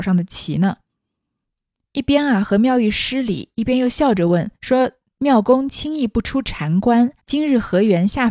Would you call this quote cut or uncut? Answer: cut